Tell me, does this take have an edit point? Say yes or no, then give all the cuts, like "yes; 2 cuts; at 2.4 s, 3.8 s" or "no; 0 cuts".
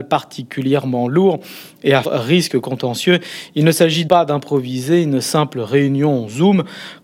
yes; 2 cuts; at 2.0 s, 4.1 s